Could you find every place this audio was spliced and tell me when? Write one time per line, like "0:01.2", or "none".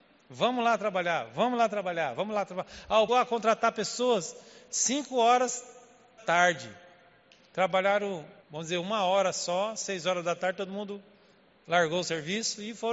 0:03.1
0:06.2
0:08.4